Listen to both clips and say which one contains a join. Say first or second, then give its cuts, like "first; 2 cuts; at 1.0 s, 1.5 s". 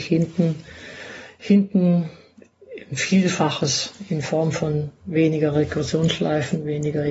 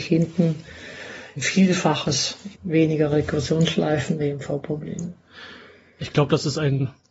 second; 3 cuts; at 1.3 s, 2.5 s, 4.2 s